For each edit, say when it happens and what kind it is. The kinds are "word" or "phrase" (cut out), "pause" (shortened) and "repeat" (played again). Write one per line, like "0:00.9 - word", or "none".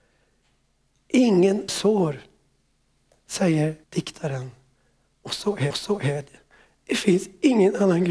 0:01.7 - phrase
0:03.8 - pause
0:05.7 - repeat